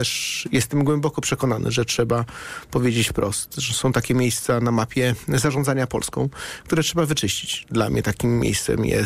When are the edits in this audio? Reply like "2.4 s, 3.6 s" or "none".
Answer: none